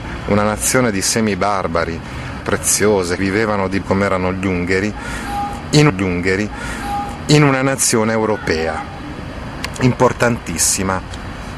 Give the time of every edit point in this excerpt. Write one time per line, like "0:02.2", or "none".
0:02.4
0:03.2
0:03.8
0:05.9